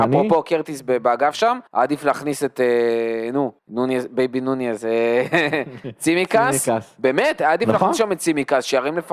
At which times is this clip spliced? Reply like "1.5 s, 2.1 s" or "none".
1.7 s, 3.6 s